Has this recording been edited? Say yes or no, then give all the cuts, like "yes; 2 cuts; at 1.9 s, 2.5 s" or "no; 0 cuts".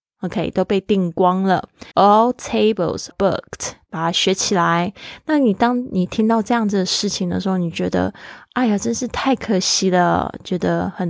yes; 2 cuts; at 1.9 s, 3.1 s